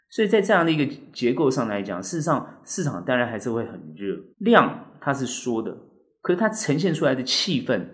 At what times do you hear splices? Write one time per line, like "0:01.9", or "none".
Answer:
0:04.3